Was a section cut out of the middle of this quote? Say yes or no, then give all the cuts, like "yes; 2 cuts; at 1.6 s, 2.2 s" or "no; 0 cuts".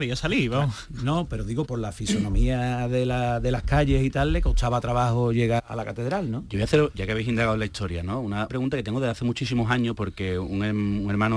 yes; 3 cuts; at 1.6 s, 5.6 s, 8.5 s